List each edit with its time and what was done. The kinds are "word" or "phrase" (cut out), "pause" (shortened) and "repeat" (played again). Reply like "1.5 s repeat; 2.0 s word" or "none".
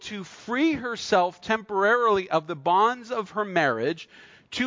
none